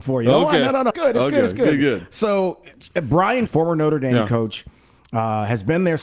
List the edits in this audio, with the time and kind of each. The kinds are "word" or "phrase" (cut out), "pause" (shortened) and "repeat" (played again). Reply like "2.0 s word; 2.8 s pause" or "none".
0.9 s word; 3.5 s word